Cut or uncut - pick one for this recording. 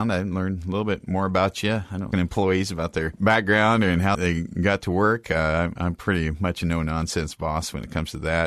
cut